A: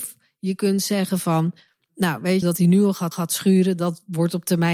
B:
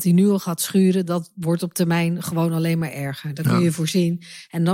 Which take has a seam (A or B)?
A